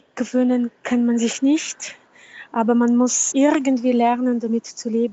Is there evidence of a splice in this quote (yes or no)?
yes